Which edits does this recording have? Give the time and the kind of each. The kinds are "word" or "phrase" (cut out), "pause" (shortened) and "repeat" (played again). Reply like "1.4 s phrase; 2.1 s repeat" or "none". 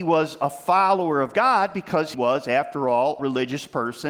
2.1 s word; 3.2 s word